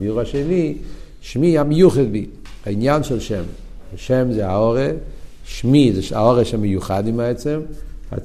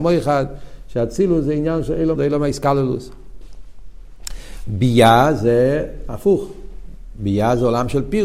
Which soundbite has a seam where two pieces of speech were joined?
second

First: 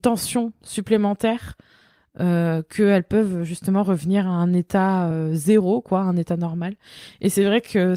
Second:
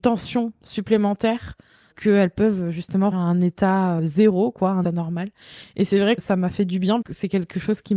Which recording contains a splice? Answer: second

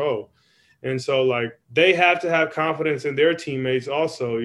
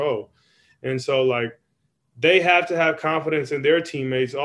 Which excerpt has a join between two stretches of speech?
first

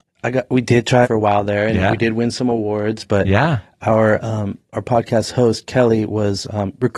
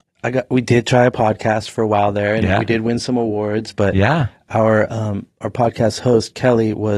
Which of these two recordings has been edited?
first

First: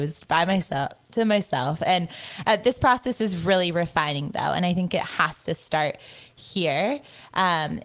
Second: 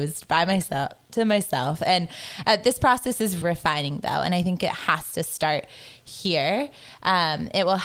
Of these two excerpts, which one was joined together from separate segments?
second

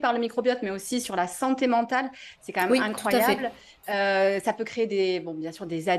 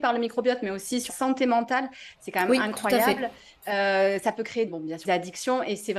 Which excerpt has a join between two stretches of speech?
second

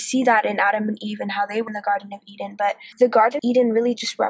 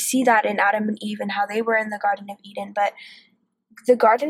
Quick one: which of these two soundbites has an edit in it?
first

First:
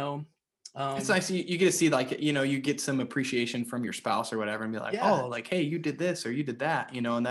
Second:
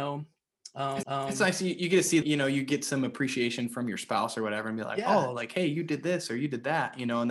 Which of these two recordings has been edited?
second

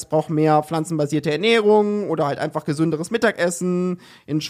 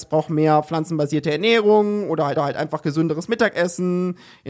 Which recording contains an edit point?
second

